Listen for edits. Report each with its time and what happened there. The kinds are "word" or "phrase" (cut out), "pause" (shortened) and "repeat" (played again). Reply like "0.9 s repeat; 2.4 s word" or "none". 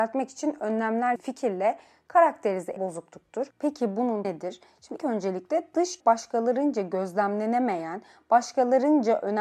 1.2 s phrase; 2.8 s phrase; 4.2 s word; 5.0 s word; 6.0 s word